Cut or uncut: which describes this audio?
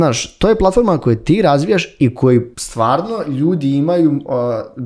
cut